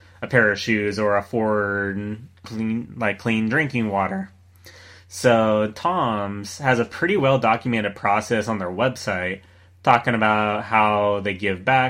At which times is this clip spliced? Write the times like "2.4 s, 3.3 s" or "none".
none

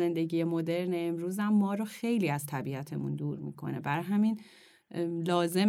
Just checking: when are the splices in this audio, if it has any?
none

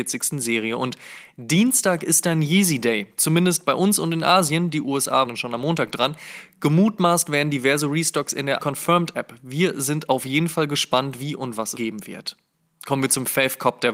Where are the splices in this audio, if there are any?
5.3 s, 8.6 s, 11.7 s

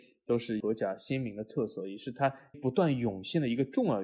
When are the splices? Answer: 2.5 s

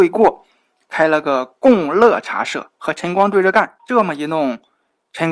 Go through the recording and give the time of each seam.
3.8 s

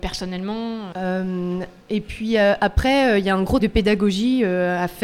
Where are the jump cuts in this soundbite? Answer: 0.9 s, 3.6 s

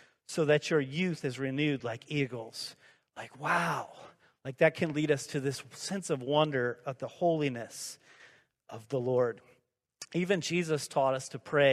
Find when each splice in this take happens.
none

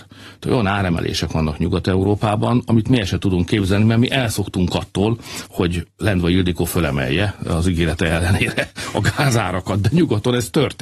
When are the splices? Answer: none

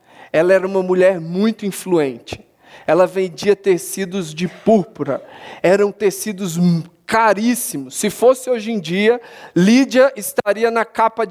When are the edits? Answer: none

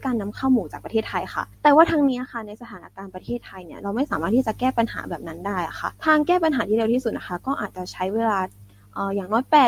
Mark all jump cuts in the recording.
1.5 s, 5.9 s

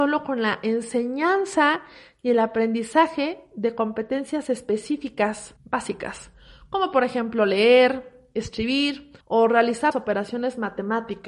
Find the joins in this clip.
5.6 s, 9.2 s, 9.9 s

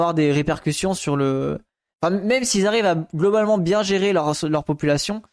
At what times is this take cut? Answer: none

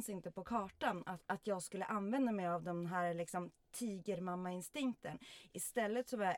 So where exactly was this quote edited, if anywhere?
none

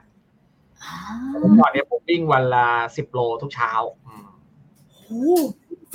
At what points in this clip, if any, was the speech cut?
4.0 s

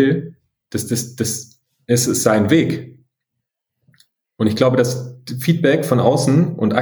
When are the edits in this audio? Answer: none

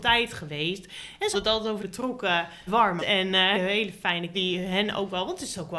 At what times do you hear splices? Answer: 1.3 s, 1.8 s, 2.7 s, 3.0 s, 3.5 s, 4.3 s

